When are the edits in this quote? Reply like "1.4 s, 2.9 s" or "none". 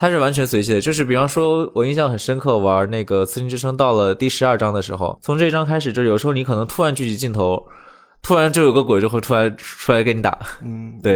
5.2 s